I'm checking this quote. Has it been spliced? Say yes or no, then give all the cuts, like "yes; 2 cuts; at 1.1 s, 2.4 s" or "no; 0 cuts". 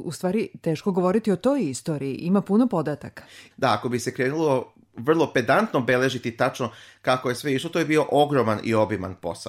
no; 0 cuts